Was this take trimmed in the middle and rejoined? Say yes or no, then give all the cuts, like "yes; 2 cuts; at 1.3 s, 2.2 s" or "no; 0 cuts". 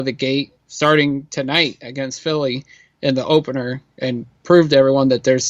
no; 0 cuts